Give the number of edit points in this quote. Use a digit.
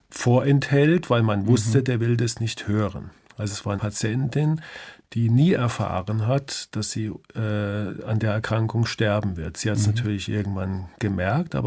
1